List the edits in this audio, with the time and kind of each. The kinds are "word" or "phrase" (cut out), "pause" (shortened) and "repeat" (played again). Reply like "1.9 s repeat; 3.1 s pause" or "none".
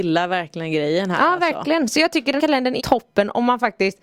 2.4 s word; 2.8 s word